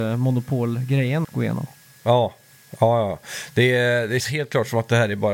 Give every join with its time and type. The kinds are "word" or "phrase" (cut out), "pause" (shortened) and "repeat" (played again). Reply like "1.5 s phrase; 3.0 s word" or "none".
1.2 s word; 4.2 s word